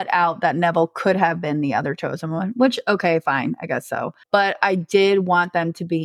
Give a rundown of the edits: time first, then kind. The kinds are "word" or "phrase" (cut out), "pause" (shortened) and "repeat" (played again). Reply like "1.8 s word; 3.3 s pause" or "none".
4.2 s pause